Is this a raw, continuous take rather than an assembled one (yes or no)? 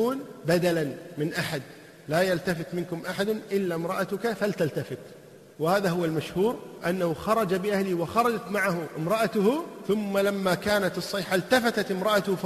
yes